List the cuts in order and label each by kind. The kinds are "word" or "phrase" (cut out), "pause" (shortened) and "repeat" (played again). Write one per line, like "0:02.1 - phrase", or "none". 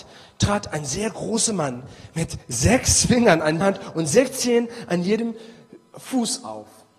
0:03.6 - word